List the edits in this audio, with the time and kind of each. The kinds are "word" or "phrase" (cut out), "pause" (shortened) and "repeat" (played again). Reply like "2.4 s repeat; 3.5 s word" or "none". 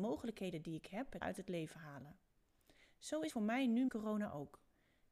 1.2 s word; 3.3 s word; 3.9 s word